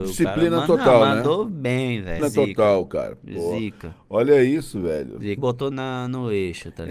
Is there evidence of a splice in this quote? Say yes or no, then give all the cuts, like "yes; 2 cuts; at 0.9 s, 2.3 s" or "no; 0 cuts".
yes; 3 cuts; at 2.2 s, 5.4 s, 5.7 s